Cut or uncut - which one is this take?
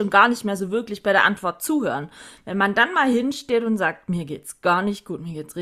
uncut